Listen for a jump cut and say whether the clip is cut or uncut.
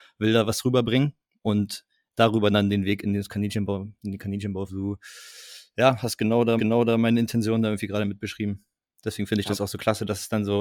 cut